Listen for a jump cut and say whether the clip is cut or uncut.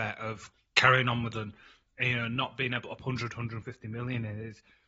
cut